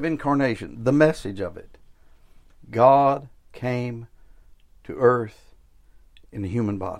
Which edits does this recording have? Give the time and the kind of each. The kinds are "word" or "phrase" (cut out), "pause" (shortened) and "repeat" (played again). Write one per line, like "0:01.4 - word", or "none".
none

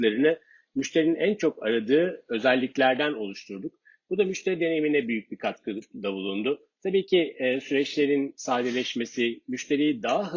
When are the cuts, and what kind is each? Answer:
none

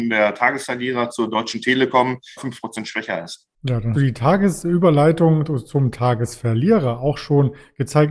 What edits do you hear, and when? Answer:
0:02.4 - phrase
0:03.6 - pause
0:03.9 - word

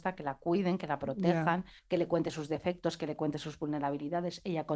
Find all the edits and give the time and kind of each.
0:01.8 - pause

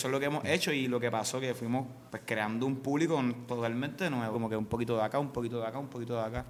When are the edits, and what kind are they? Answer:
0:02.1 - pause
0:04.3 - word

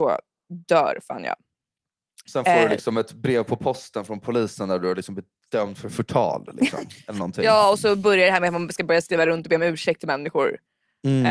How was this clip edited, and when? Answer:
none

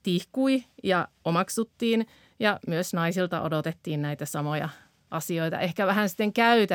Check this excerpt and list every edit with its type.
none

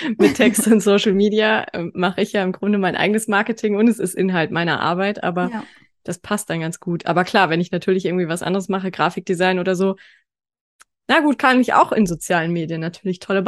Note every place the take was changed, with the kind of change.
none

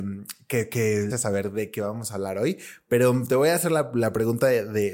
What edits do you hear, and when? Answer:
0:01.1 - phrase

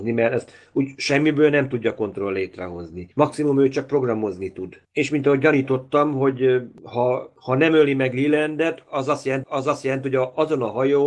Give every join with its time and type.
0:03.1 - pause
0:09.4 - repeat

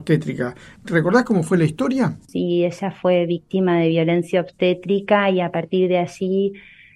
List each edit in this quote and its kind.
0:02.2 - pause

